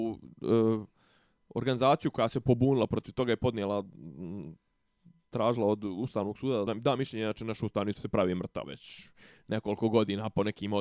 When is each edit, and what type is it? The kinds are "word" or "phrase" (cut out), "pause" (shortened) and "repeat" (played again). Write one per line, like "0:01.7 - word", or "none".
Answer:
0:06.7 - word
0:07.9 - word
0:08.6 - word